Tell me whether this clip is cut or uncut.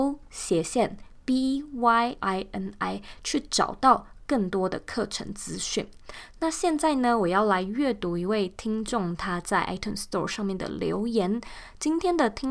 cut